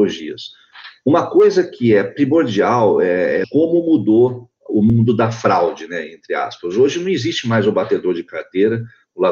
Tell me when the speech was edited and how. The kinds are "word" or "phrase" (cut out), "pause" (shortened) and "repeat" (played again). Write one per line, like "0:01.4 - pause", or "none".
0:03.4 - phrase